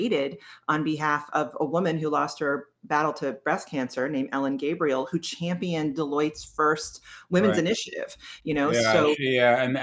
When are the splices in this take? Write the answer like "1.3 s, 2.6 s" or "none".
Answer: none

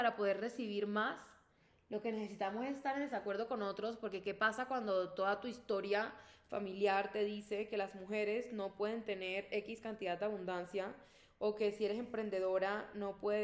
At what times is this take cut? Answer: none

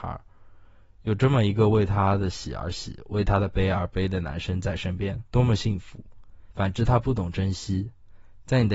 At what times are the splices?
5.3 s, 6.5 s

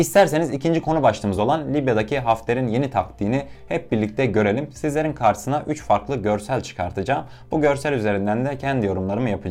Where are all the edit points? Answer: none

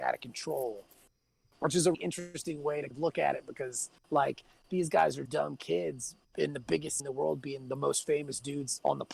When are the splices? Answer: 1.9 s, 2.9 s, 4.0 s, 5.3 s, 6.2 s, 7.0 s

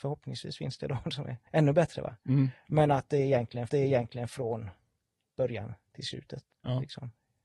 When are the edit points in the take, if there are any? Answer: 1.5 s, 3.7 s, 6.5 s

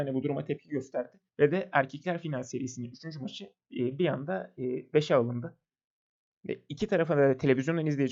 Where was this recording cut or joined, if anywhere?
1.3 s

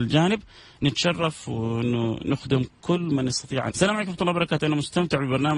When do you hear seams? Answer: 3.7 s

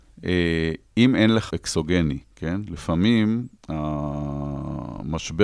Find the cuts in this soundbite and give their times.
1.5 s, 2.2 s, 3.6 s

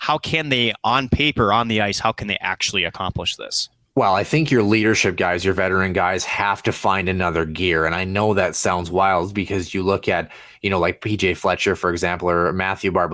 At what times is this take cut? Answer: none

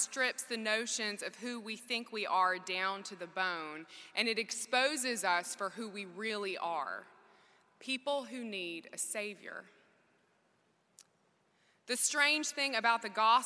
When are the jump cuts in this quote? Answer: none

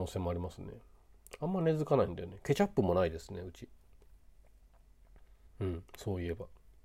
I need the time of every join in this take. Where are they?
5.5 s

